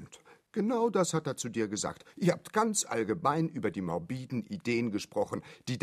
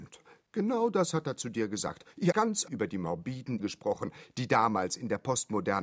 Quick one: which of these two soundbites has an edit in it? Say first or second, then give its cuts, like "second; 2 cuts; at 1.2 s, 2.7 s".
second; 3 cuts; at 2.3 s, 2.7 s, 3.6 s